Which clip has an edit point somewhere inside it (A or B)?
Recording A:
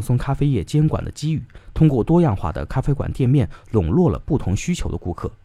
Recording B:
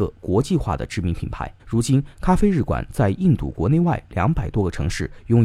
B